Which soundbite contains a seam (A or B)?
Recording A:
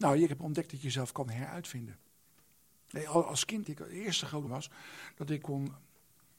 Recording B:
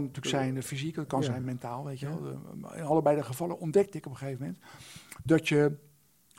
A